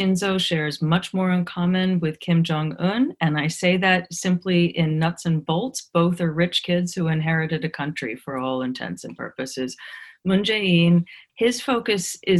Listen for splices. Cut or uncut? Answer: uncut